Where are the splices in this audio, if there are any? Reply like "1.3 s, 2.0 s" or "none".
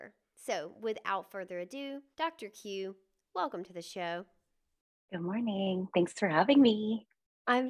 2.1 s